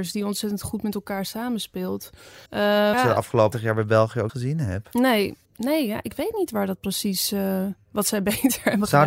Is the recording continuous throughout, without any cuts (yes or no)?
no